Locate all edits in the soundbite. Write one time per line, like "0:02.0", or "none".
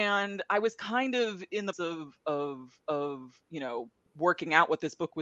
0:01.7
0:02.8
0:04.1